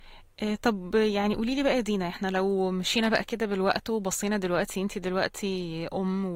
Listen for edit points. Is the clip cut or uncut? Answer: uncut